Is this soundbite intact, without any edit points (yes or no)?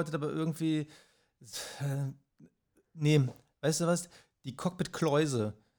yes